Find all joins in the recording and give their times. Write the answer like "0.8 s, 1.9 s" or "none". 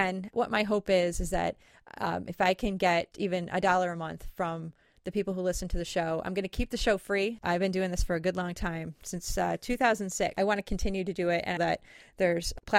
3.1 s, 11.6 s